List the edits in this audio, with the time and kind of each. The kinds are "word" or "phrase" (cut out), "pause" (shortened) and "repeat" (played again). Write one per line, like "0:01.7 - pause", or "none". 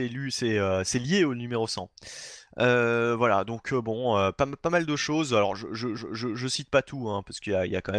0:06.0 - repeat